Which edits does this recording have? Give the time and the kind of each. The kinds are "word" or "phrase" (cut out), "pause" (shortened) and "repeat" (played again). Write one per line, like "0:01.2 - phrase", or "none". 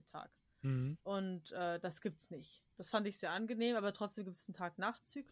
0:01.0 - pause
0:02.7 - pause